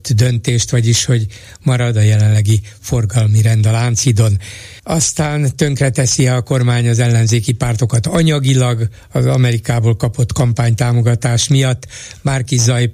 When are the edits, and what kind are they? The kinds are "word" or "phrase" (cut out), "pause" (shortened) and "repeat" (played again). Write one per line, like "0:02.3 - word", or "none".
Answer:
0:04.8 - pause